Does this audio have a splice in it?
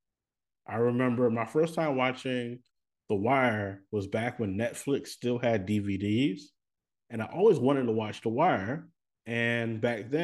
no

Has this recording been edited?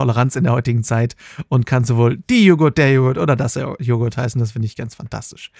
no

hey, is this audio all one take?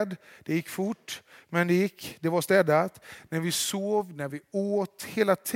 yes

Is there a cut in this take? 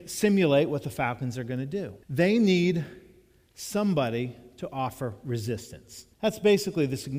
yes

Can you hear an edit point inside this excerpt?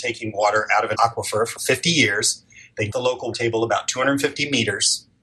yes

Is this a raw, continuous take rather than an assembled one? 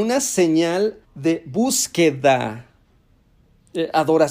no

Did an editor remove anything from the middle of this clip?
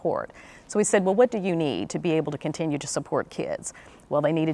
no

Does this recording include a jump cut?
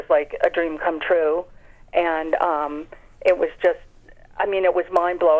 no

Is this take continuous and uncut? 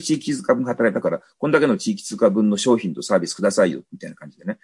yes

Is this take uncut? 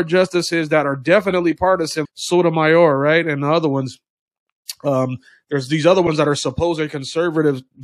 no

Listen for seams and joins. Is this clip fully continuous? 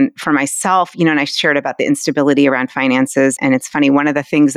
yes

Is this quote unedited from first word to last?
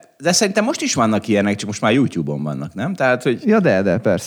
yes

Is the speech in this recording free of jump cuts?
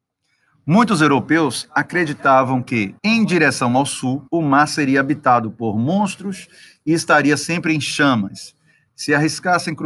no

